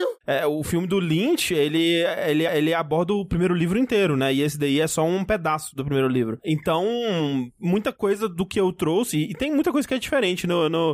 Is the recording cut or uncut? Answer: cut